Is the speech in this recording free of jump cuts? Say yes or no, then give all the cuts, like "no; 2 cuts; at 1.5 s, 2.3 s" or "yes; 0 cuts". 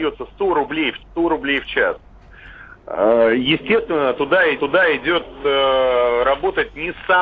no; 2 cuts; at 1.0 s, 4.6 s